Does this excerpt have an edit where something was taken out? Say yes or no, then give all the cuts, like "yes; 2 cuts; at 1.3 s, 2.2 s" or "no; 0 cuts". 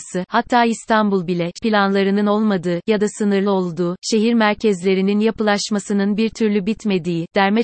yes; 1 cut; at 1.6 s